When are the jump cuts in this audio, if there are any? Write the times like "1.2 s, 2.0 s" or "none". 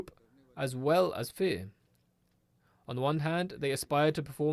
none